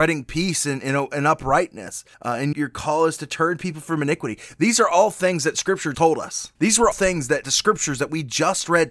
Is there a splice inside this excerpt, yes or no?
yes